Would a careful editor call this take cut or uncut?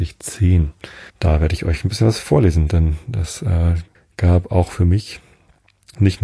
cut